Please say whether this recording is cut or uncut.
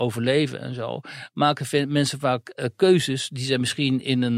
uncut